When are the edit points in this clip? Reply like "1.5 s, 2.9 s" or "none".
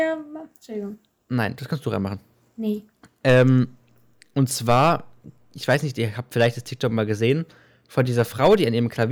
none